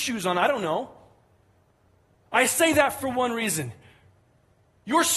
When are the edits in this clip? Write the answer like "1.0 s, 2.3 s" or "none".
none